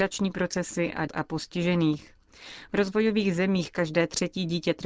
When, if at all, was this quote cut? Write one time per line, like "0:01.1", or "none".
0:01.1